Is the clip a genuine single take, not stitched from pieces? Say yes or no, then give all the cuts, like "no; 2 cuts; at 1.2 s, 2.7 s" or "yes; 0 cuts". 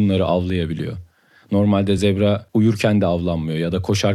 yes; 0 cuts